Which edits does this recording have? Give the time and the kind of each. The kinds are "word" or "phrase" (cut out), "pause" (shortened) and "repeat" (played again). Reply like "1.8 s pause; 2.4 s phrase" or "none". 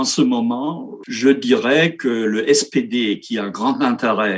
1.0 s word